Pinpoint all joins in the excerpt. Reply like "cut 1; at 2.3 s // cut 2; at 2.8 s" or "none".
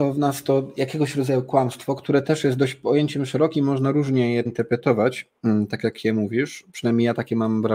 cut 1; at 4.5 s